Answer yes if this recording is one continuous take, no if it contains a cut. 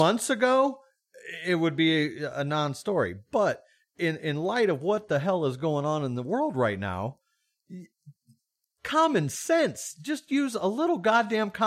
yes